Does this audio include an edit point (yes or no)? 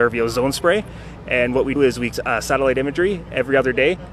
yes